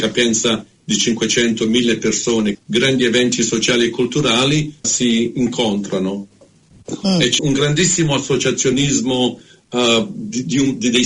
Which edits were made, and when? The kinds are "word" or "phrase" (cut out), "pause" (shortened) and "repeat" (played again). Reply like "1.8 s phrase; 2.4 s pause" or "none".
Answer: 2.5 s word; 4.8 s phrase; 7.4 s word